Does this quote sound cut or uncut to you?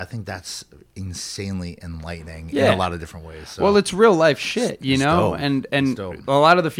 uncut